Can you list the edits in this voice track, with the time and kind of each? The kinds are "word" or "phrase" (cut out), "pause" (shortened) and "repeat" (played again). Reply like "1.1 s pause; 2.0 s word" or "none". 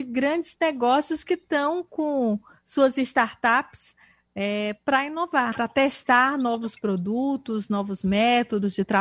5.5 s word